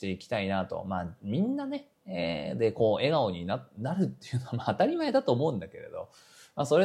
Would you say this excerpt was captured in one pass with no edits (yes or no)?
yes